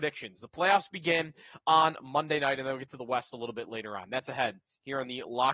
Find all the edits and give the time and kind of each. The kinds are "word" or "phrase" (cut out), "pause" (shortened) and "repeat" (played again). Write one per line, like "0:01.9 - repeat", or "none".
none